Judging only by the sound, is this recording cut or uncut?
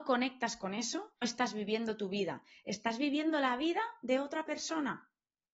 cut